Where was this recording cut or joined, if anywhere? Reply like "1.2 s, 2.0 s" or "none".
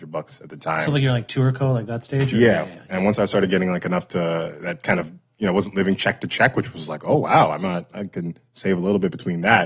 none